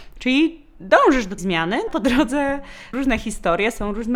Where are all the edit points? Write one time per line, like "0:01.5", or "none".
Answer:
0:01.4
0:01.9
0:02.9